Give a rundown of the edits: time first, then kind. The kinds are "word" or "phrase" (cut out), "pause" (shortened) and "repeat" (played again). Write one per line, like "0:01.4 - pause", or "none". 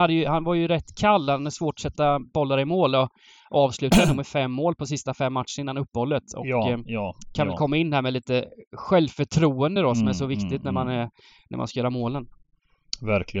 none